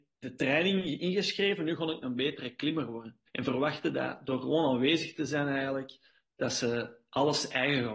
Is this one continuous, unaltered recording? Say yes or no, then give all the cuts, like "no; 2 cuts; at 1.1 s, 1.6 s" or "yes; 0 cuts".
no; 1 cut; at 3.3 s